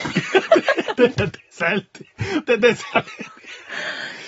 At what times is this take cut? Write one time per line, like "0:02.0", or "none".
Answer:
0:01.1
0:02.4

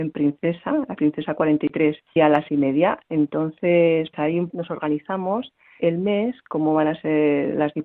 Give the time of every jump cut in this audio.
0:01.0
0:02.2
0:02.5
0:04.1
0:04.5
0:05.8

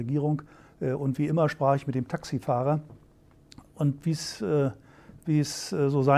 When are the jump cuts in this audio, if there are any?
none

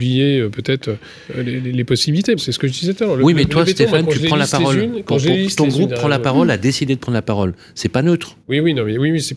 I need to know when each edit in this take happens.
0:01.2
0:02.4
0:08.4

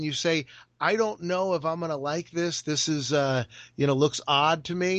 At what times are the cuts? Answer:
none

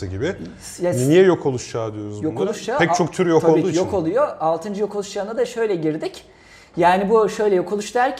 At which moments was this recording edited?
none

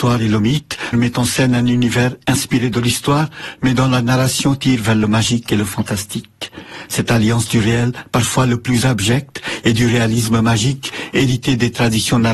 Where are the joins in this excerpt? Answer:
0:00.9

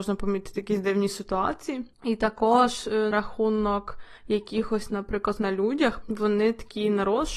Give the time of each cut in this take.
0:01.9
0:03.1
0:04.2
0:05.4
0:06.0

